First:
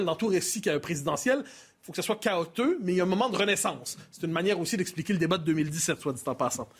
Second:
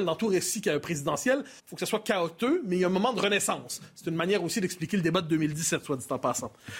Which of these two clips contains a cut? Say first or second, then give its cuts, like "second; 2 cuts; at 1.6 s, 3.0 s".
second; 1 cut; at 1.6 s